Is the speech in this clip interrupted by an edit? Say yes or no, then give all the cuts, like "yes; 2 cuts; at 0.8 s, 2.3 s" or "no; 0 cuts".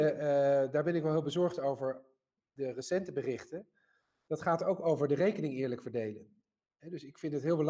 no; 0 cuts